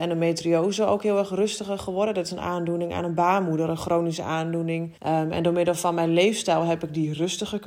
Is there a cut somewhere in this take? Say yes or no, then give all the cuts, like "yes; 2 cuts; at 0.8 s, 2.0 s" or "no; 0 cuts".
yes; 1 cut; at 5.0 s